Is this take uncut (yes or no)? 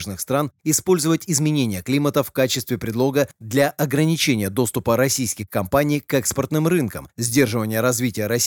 yes